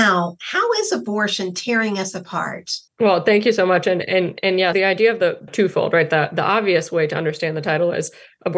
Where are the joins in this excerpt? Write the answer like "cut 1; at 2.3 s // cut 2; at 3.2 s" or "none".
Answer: cut 1; at 2.9 s // cut 2; at 4.7 s // cut 3; at 5.5 s